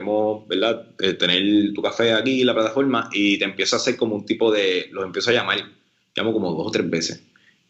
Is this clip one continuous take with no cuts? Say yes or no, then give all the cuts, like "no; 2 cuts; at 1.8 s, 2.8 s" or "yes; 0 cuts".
yes; 0 cuts